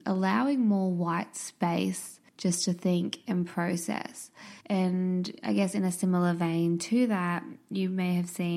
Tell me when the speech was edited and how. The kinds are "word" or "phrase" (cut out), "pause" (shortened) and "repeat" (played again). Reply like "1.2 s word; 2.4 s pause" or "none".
2.3 s pause; 4.6 s pause